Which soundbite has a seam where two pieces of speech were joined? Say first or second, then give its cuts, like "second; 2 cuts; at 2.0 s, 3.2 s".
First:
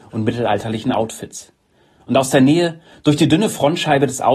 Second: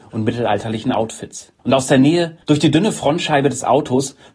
second; 2 cuts; at 1.6 s, 2.4 s